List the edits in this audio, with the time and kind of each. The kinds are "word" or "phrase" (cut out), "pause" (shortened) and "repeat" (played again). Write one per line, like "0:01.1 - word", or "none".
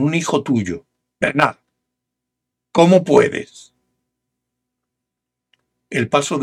none